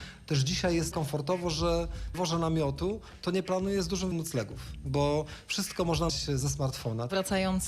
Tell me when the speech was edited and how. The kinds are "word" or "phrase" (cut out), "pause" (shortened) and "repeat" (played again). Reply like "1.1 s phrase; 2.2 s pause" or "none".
0.9 s phrase; 2.1 s phrase; 4.1 s word; 6.1 s phrase

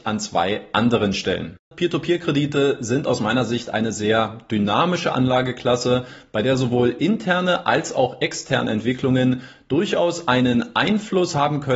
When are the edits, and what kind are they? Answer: 1.6 s pause

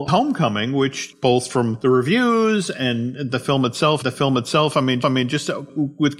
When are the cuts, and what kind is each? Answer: 4.0 s repeat; 5.0 s repeat

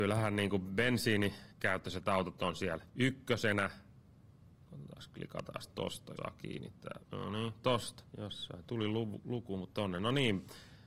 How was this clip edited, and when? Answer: 1.5 s pause; 2.9 s pause; 6.2 s word; 7.0 s pause; 8.1 s pause; 9.7 s phrase

